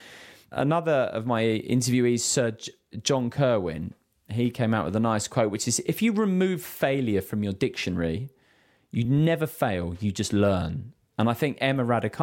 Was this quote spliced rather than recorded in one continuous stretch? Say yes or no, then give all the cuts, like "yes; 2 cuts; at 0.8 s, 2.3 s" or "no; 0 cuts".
no; 0 cuts